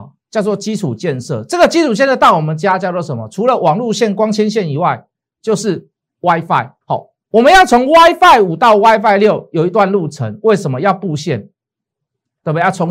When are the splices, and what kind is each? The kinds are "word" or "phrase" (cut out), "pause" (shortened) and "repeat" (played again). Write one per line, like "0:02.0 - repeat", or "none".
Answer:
0:06.8 - pause